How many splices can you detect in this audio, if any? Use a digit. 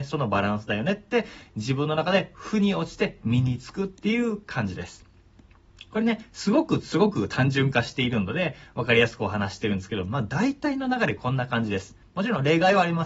0